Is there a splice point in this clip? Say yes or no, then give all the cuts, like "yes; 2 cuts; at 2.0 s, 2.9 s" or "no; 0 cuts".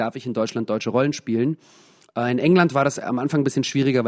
no; 0 cuts